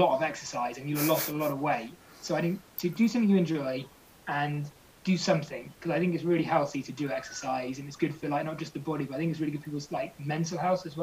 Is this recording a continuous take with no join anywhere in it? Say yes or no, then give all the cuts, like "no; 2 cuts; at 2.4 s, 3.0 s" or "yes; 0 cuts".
yes; 0 cuts